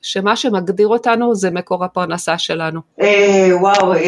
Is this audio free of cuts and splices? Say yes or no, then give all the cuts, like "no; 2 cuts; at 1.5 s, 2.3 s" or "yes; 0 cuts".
yes; 0 cuts